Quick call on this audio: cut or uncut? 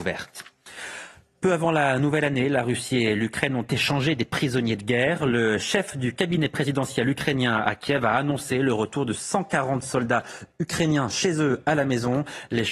uncut